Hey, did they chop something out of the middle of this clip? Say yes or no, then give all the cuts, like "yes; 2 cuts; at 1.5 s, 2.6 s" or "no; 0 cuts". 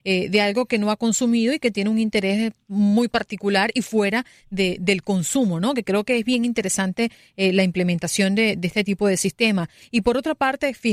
no; 0 cuts